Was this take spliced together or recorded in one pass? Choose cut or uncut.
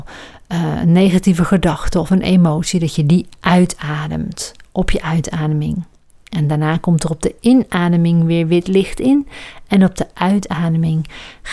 uncut